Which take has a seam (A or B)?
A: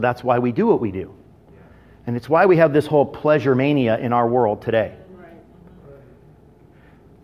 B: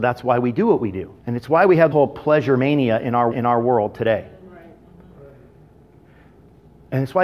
B